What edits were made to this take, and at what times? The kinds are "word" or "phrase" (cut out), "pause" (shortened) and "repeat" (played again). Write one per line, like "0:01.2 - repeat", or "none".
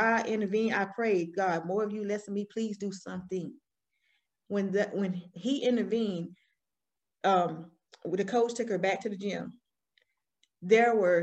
none